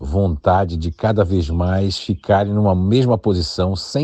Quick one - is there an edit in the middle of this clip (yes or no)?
no